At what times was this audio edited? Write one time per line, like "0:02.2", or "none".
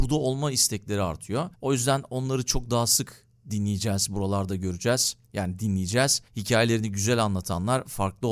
0:01.5
0:05.2
0:06.3